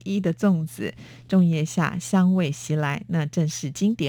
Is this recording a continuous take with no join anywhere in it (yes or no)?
yes